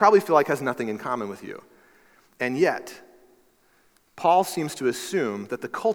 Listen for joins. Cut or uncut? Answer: uncut